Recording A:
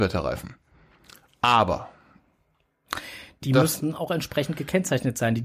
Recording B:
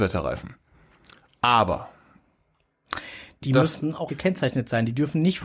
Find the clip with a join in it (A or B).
B